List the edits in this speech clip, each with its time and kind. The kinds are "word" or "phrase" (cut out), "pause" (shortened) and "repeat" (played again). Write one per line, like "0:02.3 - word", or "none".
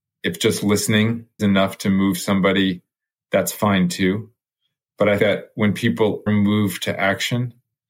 0:01.4 - word
0:05.2 - word
0:06.3 - word